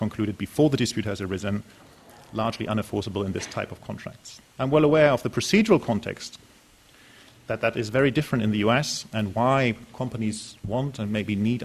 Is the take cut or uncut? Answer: cut